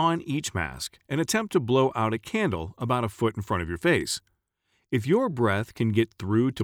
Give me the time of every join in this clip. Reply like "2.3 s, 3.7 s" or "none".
none